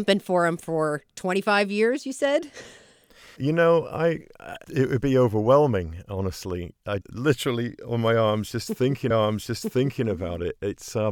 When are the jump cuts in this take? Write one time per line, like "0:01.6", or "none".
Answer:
0:03.4
0:04.6
0:07.0
0:09.1